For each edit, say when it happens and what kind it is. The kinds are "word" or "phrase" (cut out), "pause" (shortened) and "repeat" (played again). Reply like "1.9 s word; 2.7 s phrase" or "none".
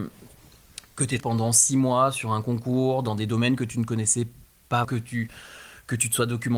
1.2 s word; 4.8 s word